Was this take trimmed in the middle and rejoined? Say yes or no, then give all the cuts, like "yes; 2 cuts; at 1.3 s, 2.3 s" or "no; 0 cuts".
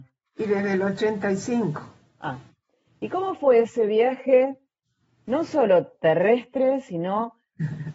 no; 0 cuts